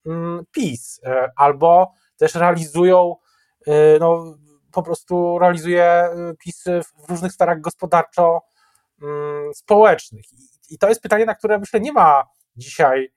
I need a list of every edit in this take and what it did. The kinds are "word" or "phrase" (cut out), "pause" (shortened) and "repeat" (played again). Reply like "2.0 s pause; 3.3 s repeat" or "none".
none